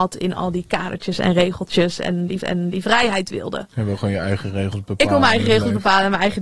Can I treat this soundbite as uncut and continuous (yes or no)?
no